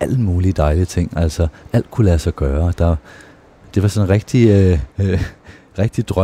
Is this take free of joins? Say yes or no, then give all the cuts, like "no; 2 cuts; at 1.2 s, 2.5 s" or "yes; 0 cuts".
no; 2 cuts; at 3.7 s, 4.9 s